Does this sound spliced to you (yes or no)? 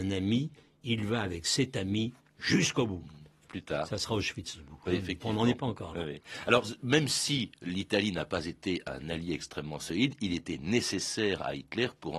no